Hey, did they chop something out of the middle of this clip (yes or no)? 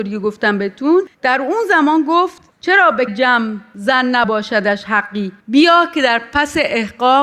yes